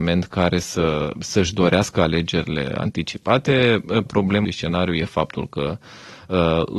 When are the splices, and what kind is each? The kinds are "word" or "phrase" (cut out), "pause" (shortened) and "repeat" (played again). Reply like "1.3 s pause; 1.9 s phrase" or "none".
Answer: 4.1 s word; 4.4 s phrase